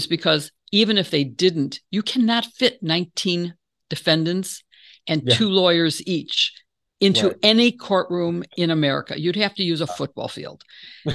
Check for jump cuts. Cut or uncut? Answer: uncut